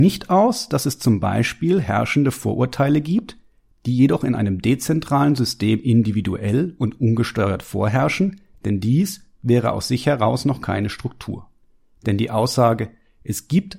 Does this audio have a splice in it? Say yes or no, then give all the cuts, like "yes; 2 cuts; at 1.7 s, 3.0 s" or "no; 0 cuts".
no; 0 cuts